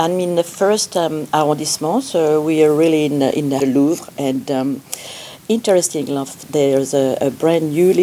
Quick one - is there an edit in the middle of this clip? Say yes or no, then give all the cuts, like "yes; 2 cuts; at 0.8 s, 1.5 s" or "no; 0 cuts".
yes; 1 cut; at 3.6 s